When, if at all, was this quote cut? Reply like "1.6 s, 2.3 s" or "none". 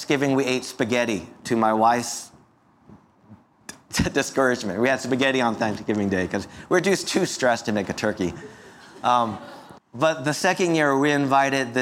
9.8 s